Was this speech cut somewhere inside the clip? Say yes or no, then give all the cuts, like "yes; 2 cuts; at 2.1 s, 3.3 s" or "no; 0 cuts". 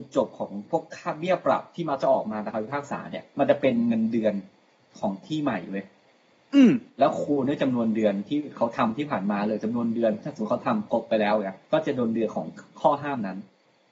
yes; 3 cuts; at 3.3 s, 6.9 s, 11.6 s